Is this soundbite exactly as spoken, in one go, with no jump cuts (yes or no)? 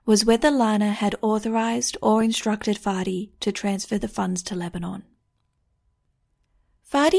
yes